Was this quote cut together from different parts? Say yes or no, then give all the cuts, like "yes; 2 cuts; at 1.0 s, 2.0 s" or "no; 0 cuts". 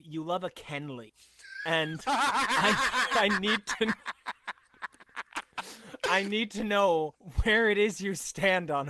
no; 0 cuts